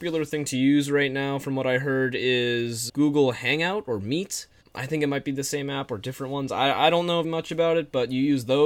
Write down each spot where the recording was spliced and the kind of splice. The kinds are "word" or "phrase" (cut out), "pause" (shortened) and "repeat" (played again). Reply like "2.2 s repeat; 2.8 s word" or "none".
2.9 s word; 7.2 s word